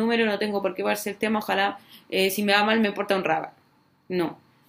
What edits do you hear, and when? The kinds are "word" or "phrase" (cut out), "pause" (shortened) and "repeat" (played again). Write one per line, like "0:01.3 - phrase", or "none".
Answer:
none